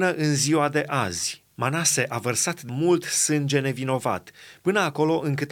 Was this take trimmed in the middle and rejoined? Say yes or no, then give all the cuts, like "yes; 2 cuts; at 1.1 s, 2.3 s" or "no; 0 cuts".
yes; 2 cuts; at 1.5 s, 2.7 s